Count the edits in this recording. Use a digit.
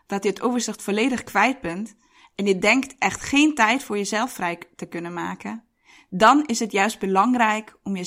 0